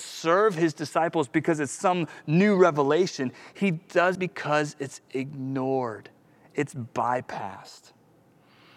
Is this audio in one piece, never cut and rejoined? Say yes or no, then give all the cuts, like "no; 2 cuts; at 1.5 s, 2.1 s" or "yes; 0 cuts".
no; 1 cut; at 4.1 s